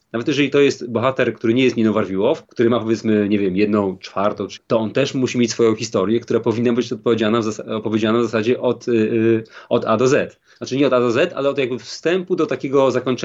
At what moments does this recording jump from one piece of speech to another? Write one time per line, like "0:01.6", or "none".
0:04.6